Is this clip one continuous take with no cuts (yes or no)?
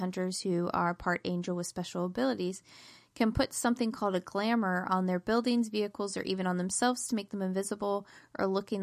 yes